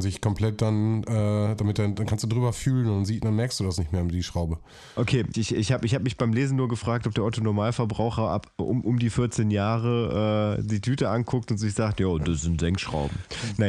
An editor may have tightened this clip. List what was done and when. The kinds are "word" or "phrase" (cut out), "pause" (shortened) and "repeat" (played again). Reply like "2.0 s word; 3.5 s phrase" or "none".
5.3 s word